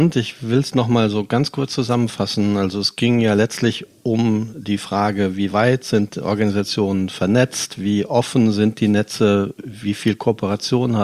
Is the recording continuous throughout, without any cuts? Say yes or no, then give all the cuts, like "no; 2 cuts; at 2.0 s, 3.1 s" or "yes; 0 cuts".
yes; 0 cuts